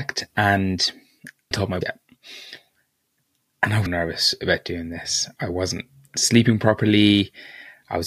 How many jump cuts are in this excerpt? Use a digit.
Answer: 3